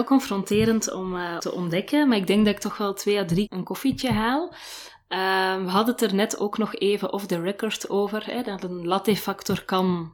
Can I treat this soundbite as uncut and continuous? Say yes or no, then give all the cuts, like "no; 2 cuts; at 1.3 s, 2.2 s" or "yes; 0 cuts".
no; 2 cuts; at 1.4 s, 3.5 s